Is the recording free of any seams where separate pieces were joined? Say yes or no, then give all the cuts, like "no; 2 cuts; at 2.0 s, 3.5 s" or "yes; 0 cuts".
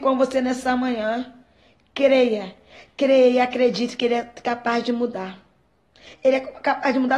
yes; 0 cuts